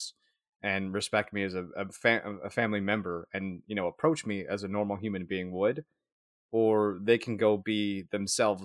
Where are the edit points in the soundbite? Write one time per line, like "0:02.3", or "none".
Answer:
none